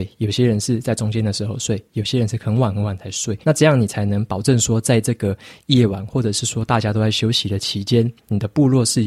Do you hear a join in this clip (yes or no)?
yes